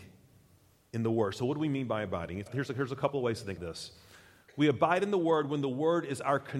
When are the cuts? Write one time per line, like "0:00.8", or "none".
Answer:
0:02.5
0:03.6